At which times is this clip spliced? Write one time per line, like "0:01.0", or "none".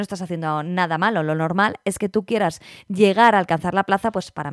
none